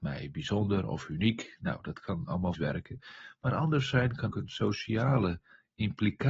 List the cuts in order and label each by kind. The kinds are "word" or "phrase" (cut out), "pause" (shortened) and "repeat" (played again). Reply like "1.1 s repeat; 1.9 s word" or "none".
2.5 s word; 4.3 s word